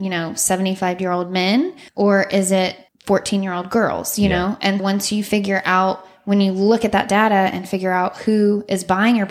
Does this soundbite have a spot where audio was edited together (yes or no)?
yes